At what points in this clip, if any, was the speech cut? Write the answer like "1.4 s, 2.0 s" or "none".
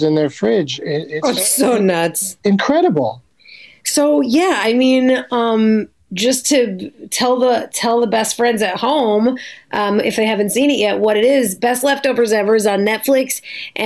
none